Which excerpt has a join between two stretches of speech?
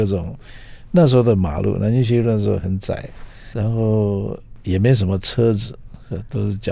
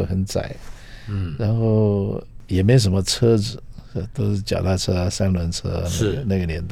first; 1 cut; at 3.5 s

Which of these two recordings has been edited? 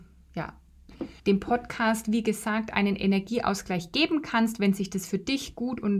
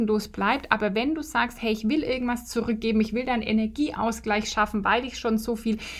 first; 1 cut; at 1.2 s

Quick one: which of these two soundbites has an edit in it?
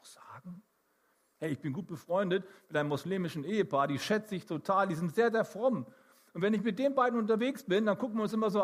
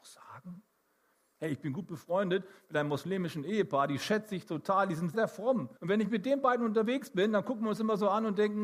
second; 2 cuts; at 5.1 s, 5.8 s

